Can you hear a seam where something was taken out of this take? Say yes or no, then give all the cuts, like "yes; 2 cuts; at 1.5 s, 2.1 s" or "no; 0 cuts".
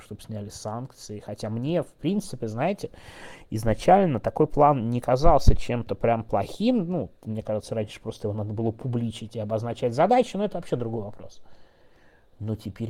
yes; 1 cut; at 7.1 s